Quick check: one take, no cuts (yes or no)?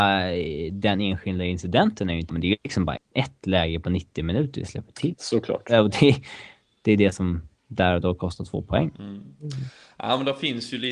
no